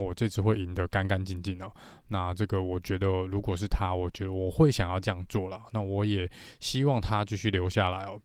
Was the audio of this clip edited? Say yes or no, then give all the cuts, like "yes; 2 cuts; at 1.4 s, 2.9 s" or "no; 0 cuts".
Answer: no; 0 cuts